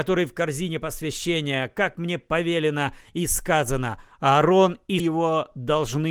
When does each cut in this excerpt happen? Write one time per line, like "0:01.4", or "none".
0:05.0